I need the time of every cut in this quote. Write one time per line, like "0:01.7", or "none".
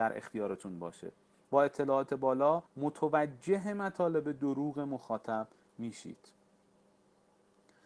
0:02.7